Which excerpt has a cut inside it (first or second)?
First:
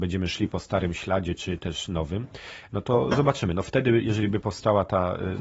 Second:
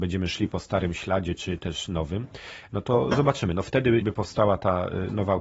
second